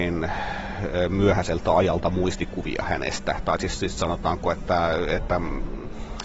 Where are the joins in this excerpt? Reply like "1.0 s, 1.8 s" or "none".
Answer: none